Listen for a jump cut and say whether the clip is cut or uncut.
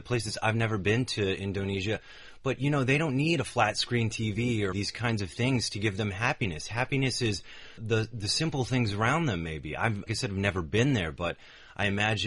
cut